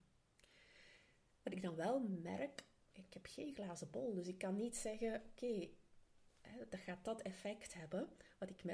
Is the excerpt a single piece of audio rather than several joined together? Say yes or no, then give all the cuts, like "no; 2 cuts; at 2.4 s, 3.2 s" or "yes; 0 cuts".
yes; 0 cuts